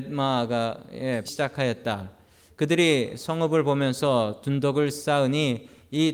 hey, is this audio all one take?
no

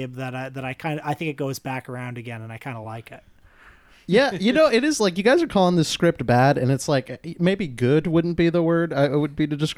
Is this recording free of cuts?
yes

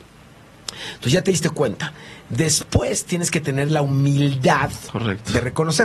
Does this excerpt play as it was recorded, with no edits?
yes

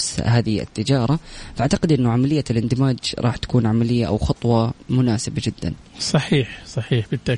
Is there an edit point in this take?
no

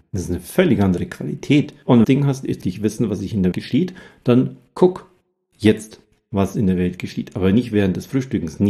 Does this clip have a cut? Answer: yes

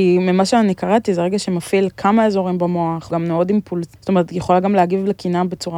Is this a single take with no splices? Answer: no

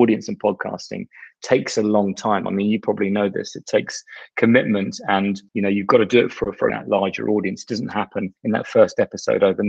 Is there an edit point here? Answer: yes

